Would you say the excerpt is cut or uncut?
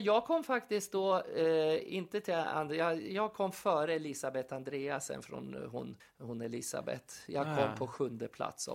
cut